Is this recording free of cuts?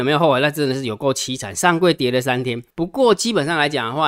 no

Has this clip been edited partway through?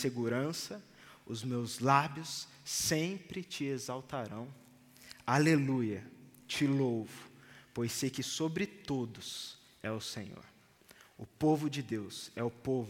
no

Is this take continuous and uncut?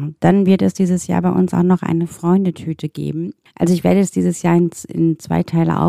yes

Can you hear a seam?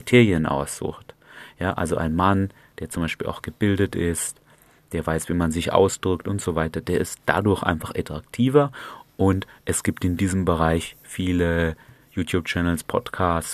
no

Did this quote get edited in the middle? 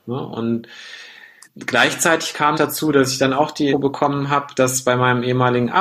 yes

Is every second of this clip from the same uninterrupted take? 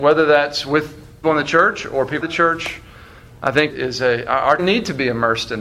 no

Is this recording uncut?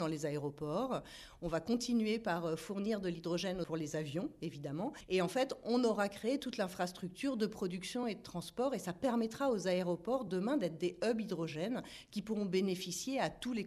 yes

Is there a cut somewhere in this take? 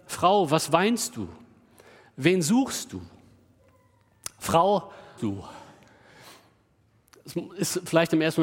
yes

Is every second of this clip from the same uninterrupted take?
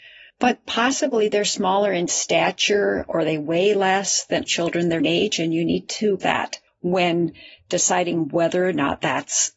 no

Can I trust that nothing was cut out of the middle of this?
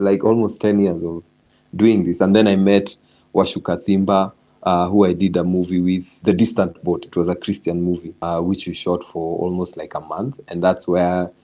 yes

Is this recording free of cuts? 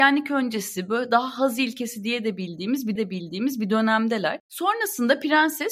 no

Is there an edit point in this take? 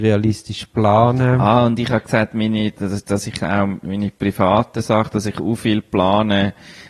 no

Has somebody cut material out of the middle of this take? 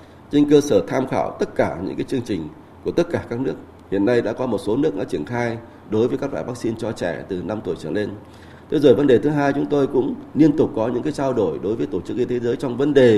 no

